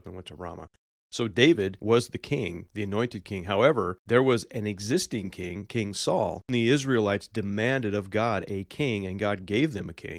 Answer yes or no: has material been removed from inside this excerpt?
no